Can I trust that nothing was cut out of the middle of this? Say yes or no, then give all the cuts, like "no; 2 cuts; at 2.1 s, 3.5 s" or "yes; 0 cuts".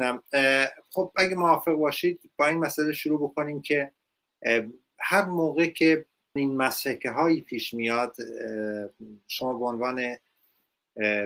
no; 1 cut; at 6.4 s